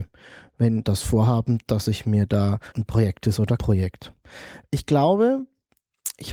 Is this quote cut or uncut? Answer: cut